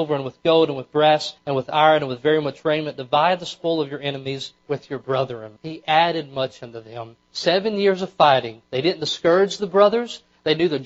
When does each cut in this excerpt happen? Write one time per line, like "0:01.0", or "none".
0:01.4
0:04.6
0:05.6
0:07.2
0:08.7